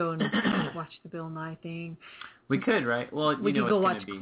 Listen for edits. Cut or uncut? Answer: uncut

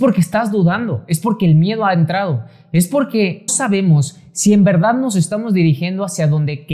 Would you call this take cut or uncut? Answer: cut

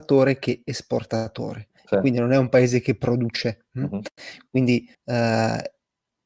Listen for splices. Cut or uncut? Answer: cut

